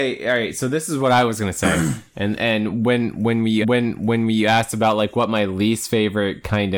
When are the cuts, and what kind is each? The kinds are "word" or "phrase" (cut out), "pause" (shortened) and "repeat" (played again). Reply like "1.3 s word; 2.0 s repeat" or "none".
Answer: 3.6 s repeat